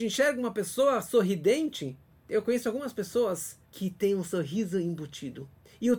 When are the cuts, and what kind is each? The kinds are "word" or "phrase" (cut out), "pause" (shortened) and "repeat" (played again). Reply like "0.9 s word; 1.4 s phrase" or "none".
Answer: 3.7 s pause